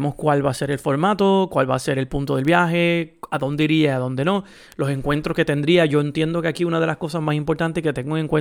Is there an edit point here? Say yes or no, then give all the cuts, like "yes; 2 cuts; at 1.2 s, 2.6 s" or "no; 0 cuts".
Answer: no; 0 cuts